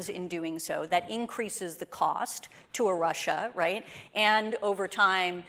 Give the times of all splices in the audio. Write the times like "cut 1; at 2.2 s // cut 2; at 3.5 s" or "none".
none